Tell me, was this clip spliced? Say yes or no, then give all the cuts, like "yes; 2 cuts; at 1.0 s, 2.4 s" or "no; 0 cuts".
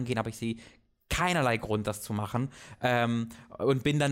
no; 0 cuts